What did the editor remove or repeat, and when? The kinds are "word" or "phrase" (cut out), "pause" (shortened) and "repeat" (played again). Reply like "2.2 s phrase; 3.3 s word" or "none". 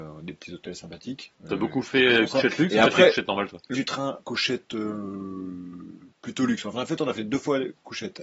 1.3 s pause; 3.7 s word; 4.2 s word